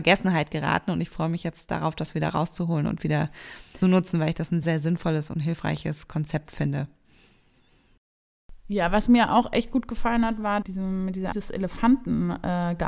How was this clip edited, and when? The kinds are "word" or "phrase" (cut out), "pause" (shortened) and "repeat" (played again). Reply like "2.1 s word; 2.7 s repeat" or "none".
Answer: 3.8 s word; 4.6 s word; 8.6 s pause; 10.6 s phrase; 11.3 s word